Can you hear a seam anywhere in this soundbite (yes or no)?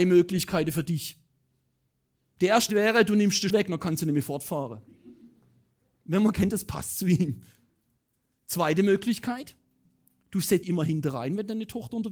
yes